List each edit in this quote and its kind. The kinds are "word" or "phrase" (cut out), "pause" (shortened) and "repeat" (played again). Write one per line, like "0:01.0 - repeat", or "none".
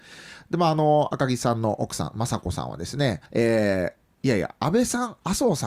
0:03.3 - pause